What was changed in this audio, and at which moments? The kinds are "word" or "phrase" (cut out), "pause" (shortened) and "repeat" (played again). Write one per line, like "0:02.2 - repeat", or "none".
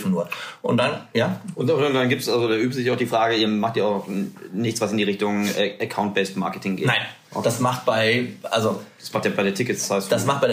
none